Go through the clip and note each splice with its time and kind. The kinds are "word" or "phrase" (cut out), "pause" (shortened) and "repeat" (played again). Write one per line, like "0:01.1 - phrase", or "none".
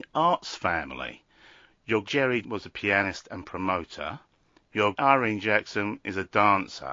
0:02.0 - word
0:02.4 - word
0:04.9 - word